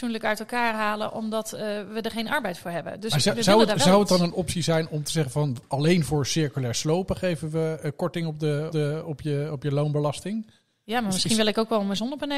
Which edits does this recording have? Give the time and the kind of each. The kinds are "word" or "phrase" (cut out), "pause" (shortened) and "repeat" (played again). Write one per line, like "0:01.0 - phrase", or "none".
0:08.7 - repeat